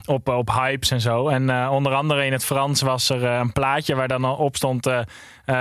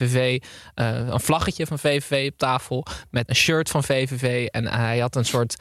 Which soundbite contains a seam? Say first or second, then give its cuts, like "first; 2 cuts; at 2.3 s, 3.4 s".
second; 1 cut; at 3.3 s